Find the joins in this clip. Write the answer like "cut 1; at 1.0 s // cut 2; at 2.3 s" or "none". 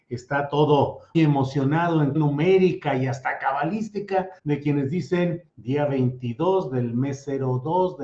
cut 1; at 1.1 s // cut 2; at 2.1 s // cut 3; at 4.4 s // cut 4; at 5.5 s